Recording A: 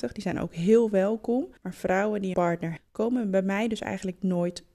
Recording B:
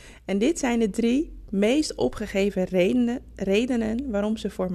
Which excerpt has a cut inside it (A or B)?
A